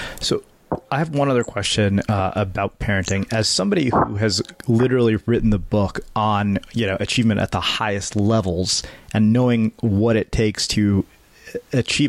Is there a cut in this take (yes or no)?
no